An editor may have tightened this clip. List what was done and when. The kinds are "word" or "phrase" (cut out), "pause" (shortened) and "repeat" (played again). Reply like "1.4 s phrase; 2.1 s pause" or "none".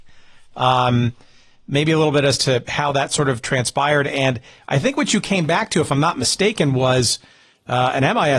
none